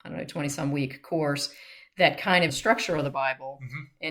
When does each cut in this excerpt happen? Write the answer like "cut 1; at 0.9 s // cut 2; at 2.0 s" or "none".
cut 1; at 2.5 s